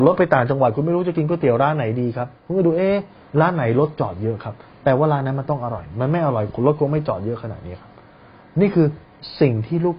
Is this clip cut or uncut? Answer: cut